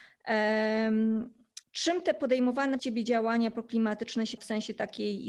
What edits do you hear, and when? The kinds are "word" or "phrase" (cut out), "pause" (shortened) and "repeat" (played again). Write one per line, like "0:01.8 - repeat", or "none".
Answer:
0:01.6 - pause
0:02.8 - word
0:04.4 - word